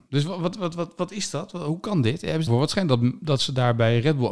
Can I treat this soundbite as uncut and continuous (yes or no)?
no